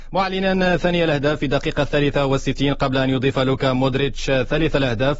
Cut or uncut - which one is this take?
uncut